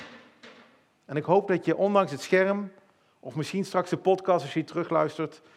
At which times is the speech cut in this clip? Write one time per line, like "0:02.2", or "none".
none